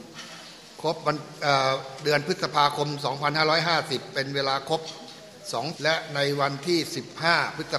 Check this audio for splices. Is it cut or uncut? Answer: cut